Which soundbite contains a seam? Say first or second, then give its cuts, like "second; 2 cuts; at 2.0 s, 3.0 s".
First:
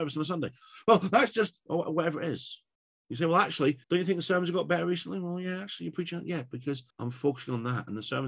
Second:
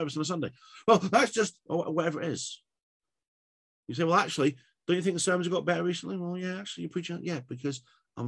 first; 3 cuts; at 2.7 s, 3.8 s, 6.9 s